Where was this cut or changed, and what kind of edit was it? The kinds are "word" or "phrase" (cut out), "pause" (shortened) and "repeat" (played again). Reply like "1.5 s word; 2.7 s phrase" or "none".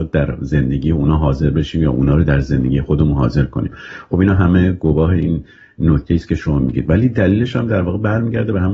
none